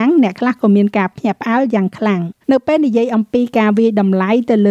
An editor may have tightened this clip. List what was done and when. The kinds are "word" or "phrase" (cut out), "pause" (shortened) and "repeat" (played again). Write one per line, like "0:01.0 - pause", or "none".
0:02.4 - pause